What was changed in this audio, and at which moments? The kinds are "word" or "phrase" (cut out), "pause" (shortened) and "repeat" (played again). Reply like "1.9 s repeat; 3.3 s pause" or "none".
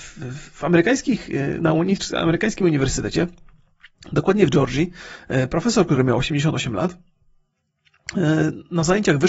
none